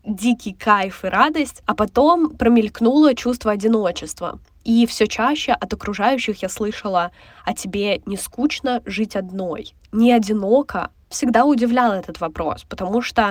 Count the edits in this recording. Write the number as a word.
zero